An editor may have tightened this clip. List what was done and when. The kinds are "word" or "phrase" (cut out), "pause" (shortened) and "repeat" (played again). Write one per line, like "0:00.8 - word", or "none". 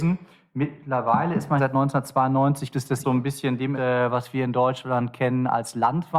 0:01.6 - word
0:02.7 - word
0:03.0 - phrase
0:03.7 - word